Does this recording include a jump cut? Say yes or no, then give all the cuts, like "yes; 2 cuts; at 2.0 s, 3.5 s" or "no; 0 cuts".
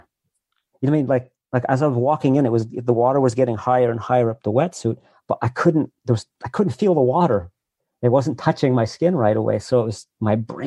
no; 0 cuts